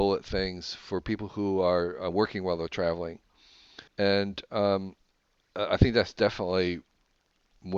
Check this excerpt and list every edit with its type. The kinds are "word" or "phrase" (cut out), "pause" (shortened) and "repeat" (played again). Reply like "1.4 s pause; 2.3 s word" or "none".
3.9 s pause